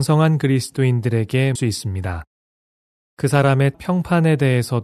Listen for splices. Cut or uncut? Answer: cut